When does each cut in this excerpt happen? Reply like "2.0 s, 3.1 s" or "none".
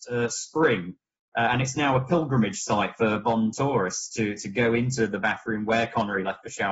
none